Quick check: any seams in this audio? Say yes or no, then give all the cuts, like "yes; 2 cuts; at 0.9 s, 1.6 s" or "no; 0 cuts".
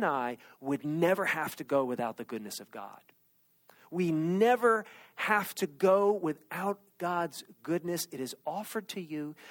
no; 0 cuts